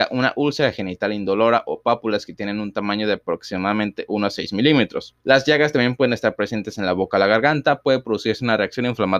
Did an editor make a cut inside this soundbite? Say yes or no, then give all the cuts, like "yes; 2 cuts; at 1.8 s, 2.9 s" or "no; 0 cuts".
yes; 1 cut; at 5.2 s